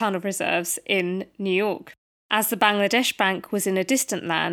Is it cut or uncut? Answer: uncut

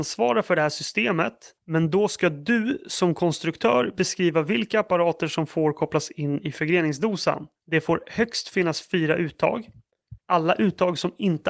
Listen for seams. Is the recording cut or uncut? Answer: cut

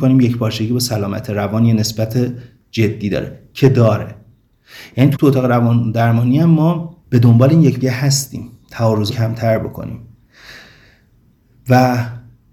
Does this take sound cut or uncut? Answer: cut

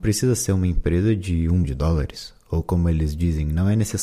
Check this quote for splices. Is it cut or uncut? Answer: cut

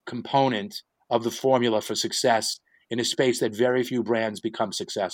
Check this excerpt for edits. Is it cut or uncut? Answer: uncut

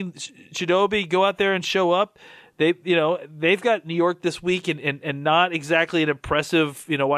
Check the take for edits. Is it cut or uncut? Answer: uncut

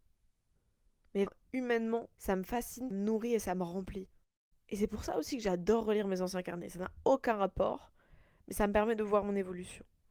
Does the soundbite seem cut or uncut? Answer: cut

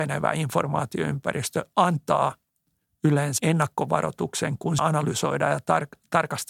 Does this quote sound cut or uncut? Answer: cut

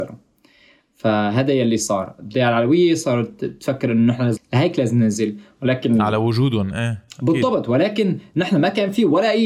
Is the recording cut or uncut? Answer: cut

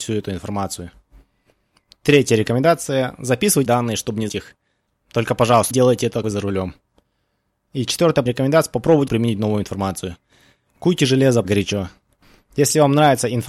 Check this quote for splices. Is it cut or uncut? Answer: cut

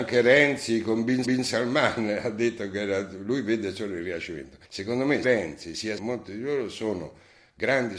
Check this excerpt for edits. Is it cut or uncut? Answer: cut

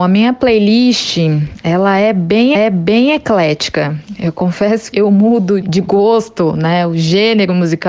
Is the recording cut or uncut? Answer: cut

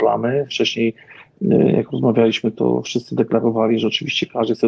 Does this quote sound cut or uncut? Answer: uncut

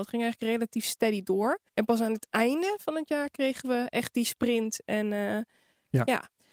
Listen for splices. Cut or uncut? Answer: cut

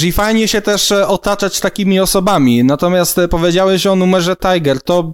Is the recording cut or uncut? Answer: uncut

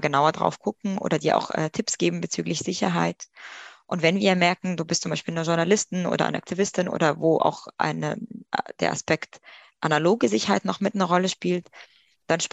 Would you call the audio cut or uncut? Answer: uncut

